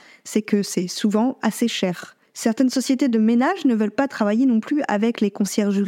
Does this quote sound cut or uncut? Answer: cut